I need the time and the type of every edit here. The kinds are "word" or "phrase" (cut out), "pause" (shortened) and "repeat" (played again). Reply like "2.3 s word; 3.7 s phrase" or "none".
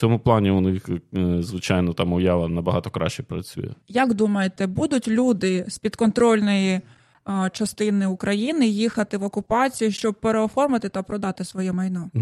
3.8 s pause